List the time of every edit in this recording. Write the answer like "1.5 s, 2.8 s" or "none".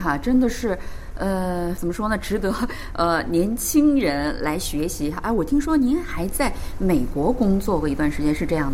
1.8 s